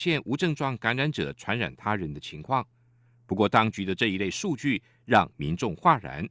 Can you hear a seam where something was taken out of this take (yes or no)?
no